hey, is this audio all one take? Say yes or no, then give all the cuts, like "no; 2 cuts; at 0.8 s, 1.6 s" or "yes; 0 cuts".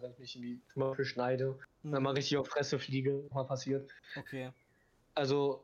no; 1 cut; at 3.3 s